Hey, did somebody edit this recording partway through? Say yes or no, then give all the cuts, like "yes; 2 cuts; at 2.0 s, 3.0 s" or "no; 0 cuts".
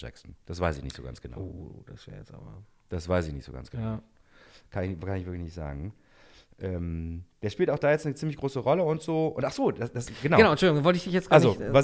no; 0 cuts